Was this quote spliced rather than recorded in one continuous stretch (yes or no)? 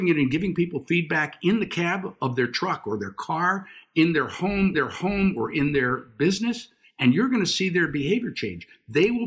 yes